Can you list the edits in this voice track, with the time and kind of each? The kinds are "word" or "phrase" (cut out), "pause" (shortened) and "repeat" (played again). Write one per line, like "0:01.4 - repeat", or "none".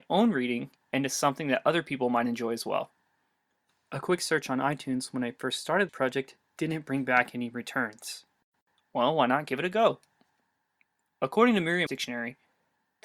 0:05.9 - word
0:11.9 - word